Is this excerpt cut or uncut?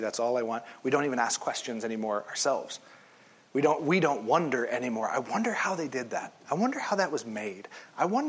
uncut